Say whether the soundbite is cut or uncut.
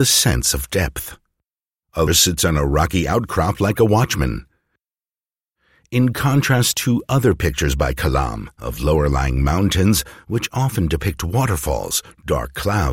cut